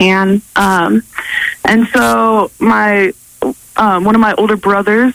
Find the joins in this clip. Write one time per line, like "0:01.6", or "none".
none